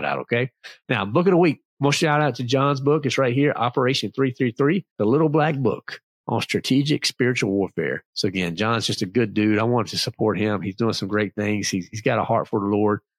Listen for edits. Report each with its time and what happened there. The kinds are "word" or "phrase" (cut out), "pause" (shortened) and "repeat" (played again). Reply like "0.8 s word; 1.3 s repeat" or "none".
1.7 s pause; 4.9 s pause; 8.1 s pause